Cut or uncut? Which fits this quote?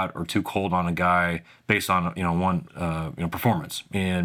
cut